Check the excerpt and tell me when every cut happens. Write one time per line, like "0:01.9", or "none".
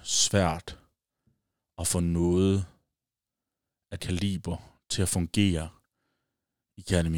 0:04.0